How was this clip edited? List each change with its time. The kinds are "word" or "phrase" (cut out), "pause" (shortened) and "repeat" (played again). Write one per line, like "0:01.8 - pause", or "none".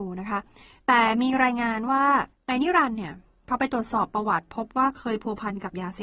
0:02.3 - pause